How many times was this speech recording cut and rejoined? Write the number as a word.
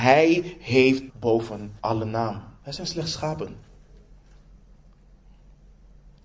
three